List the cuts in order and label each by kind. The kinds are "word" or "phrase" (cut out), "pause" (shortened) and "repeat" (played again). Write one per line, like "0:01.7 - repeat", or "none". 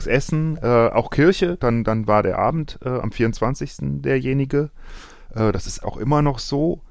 0:01.6 - phrase
0:05.8 - word

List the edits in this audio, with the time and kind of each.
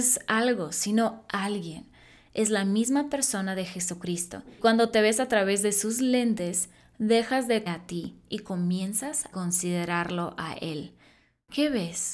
0:04.6 - word
0:07.7 - word
0:09.3 - word

